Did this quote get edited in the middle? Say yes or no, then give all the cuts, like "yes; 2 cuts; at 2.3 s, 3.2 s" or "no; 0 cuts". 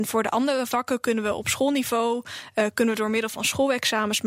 no; 0 cuts